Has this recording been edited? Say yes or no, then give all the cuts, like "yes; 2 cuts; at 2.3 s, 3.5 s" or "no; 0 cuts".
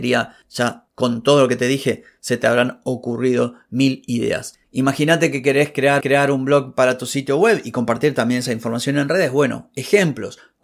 yes; 1 cut; at 6.0 s